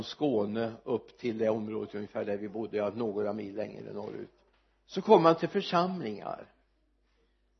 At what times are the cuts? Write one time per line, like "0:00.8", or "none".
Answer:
0:04.5